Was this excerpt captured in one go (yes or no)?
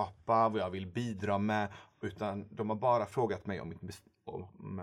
yes